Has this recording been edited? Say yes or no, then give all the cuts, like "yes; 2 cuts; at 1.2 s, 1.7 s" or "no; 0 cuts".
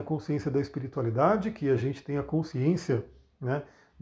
no; 0 cuts